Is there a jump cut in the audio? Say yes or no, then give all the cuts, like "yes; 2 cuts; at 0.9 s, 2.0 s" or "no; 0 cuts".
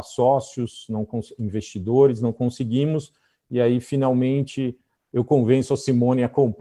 no; 0 cuts